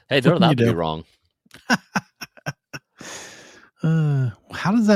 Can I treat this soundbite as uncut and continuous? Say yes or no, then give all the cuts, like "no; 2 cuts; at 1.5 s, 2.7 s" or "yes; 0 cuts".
yes; 0 cuts